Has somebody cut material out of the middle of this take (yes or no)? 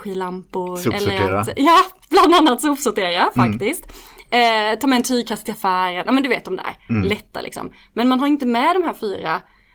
no